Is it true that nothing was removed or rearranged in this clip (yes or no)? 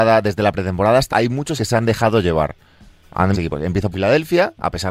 no